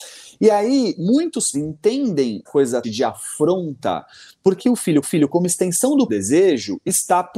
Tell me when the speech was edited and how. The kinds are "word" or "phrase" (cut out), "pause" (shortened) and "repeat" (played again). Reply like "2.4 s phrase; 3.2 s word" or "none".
1.5 s word; 2.5 s word; 2.8 s phrase; 4.6 s word; 5.0 s repeat; 6.1 s word